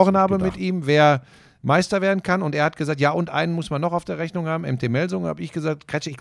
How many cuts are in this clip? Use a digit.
0